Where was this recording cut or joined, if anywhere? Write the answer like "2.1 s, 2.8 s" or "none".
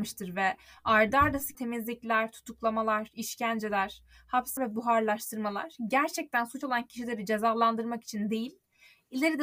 1.5 s, 4.6 s, 6.6 s